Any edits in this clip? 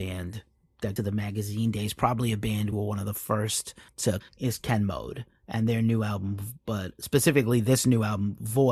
yes; 3 cuts; at 1.0 s, 2.7 s, 4.2 s

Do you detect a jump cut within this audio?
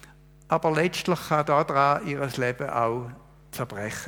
no; 0 cuts

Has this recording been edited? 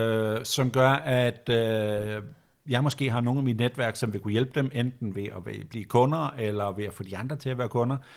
no; 0 cuts

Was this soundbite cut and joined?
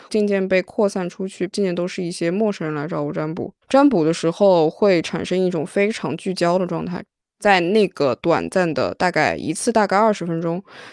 yes; 1 cut; at 3.6 s

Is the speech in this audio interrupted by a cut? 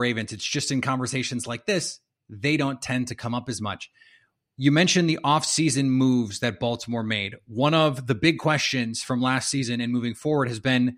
no; 0 cuts

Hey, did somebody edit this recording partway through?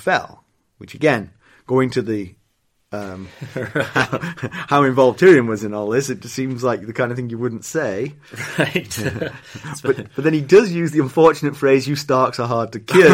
no; 0 cuts

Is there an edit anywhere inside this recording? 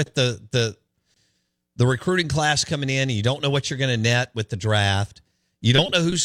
no; 0 cuts

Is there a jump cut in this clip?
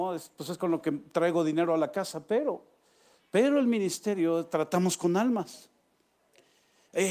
no; 0 cuts

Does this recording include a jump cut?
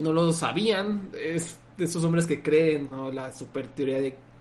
yes; 1 cut; at 2.9 s

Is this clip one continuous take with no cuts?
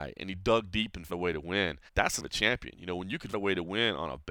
no; 4 cuts; at 1.1 s, 1.9 s, 2.2 s, 3.3 s

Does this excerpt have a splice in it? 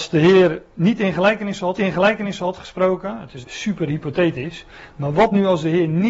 yes; 2 cuts; at 1.8 s, 3.4 s

